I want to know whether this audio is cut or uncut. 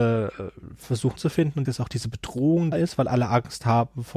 cut